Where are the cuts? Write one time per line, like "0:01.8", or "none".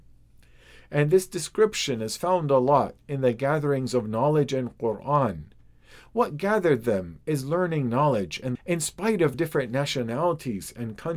0:08.5
0:09.3